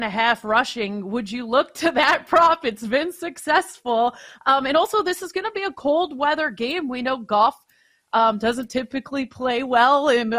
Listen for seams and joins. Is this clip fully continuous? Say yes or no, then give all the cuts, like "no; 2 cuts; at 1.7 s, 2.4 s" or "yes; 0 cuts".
yes; 0 cuts